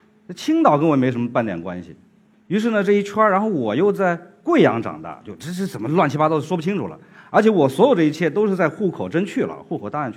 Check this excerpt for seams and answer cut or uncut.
cut